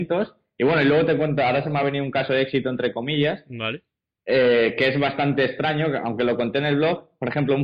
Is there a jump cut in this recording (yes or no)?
no